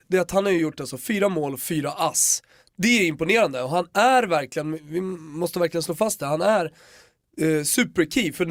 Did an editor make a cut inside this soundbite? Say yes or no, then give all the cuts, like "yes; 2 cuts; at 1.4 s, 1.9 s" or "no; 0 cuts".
no; 0 cuts